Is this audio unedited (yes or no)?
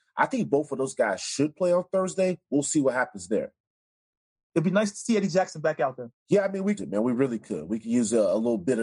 no